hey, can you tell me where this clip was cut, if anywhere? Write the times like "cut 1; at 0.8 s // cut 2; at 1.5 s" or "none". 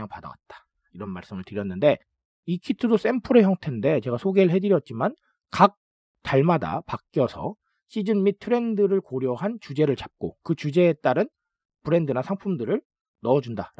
none